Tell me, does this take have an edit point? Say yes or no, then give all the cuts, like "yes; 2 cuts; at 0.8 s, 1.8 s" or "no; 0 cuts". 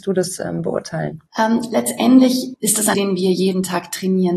yes; 3 cuts; at 1.3 s, 2.5 s, 2.9 s